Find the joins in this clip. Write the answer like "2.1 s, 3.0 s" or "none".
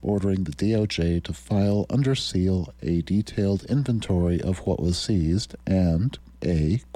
none